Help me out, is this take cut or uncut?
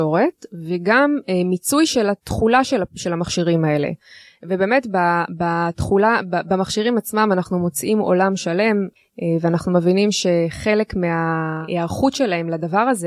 uncut